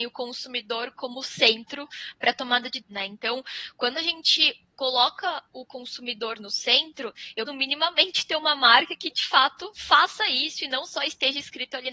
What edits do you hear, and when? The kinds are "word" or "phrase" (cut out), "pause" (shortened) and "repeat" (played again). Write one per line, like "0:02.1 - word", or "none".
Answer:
0:02.8 - phrase
0:07.5 - word